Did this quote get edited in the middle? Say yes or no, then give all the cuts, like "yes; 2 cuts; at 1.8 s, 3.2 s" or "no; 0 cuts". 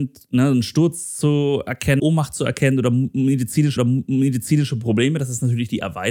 yes; 2 cuts; at 2.0 s, 3.8 s